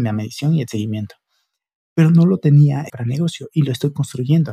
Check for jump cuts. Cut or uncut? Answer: cut